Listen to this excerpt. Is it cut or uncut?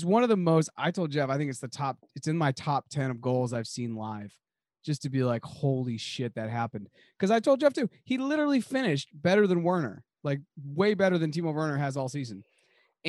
uncut